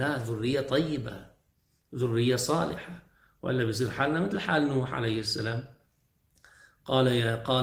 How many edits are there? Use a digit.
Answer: 0